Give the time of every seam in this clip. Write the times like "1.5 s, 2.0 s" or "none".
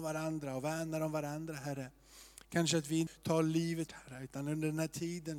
3.9 s